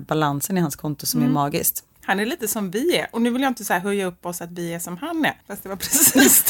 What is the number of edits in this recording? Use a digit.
2